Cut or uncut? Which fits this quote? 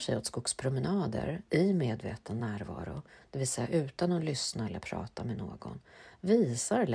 uncut